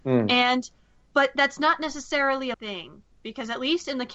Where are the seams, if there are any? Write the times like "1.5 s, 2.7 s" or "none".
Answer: 2.5 s, 3.1 s